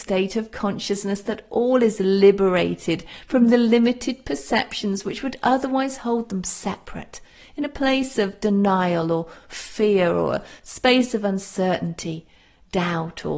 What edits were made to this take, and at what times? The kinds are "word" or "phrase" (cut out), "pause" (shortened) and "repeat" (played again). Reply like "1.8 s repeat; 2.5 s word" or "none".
none

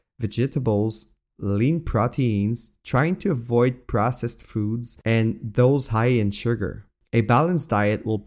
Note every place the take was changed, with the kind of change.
none

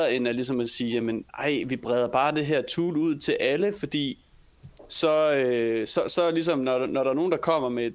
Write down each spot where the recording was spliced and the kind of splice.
1.3 s pause

